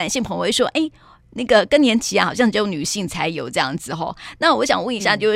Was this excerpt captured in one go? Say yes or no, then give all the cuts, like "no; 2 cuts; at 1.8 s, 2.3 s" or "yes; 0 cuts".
yes; 0 cuts